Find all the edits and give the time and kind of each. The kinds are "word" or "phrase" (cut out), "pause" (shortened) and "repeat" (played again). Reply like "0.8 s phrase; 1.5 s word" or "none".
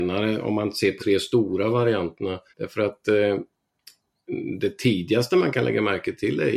1.0 s word; 2.5 s pause